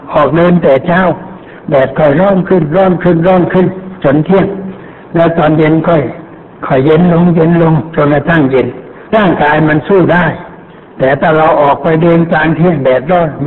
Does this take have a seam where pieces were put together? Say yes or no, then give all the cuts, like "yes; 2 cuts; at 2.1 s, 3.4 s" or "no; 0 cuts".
yes; 1 cut; at 9.1 s